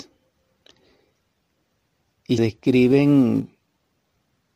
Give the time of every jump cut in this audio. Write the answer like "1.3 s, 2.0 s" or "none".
2.4 s